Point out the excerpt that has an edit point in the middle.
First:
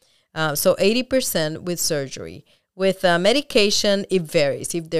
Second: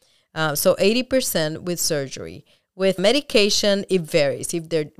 second; 1 cut; at 3.0 s

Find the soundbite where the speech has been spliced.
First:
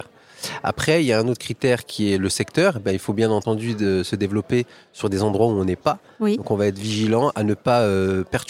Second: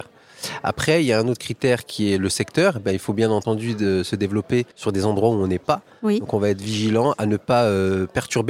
second; 1 cut; at 4.7 s

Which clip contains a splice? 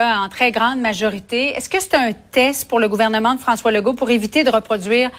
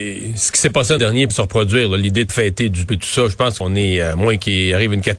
second; 5 cuts; at 1.0 s, 1.3 s, 2.3 s, 2.9 s, 3.6 s

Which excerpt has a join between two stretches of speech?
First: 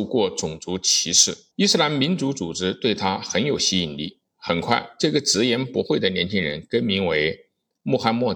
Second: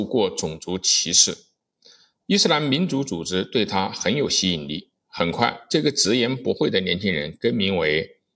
first; 1 cut; at 1.5 s

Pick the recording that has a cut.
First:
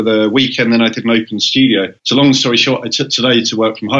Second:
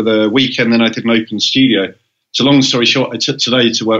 first; 1 cut; at 2.0 s

